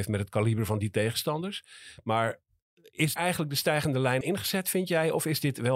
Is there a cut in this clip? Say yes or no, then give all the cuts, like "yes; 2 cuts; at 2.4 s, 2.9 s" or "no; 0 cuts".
yes; 2 cuts; at 3.2 s, 4.2 s